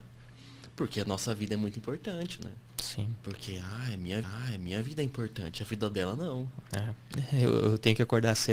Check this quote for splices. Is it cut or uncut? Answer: cut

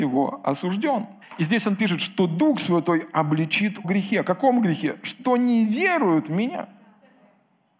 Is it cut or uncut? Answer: cut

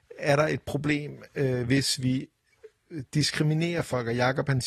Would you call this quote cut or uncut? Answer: uncut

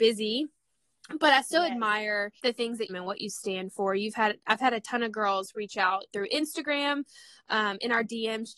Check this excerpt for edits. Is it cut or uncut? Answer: cut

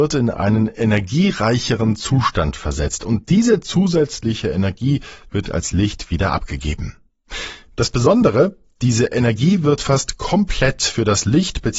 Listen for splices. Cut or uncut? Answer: uncut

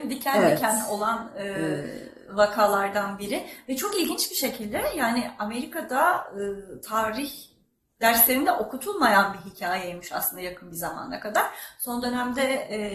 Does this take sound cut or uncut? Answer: uncut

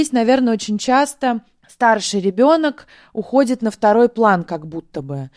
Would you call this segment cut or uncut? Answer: uncut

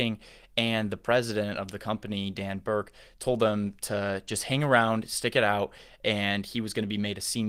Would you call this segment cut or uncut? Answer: uncut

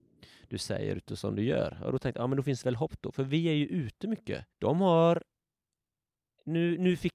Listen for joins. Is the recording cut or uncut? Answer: cut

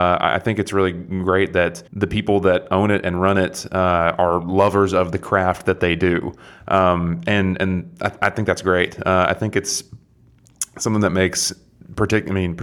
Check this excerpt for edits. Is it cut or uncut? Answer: cut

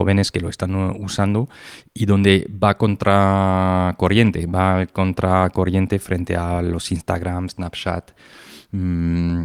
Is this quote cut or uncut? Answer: uncut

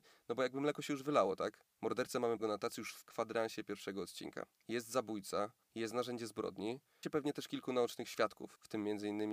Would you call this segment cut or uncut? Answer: cut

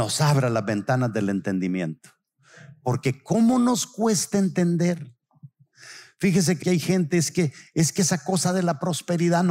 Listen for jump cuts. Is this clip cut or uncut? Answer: cut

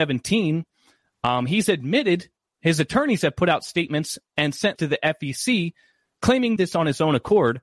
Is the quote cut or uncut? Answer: cut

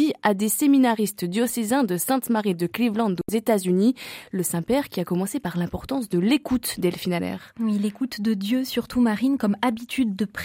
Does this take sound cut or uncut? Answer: uncut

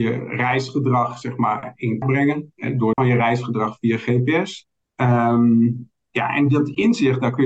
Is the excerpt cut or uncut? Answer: cut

